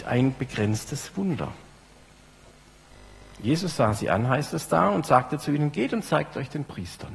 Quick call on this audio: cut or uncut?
uncut